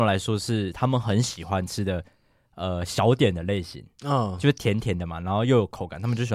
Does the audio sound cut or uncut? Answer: uncut